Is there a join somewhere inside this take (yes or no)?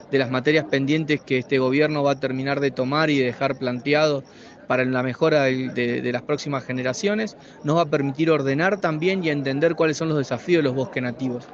no